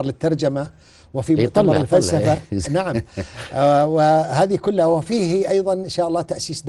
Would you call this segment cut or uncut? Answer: uncut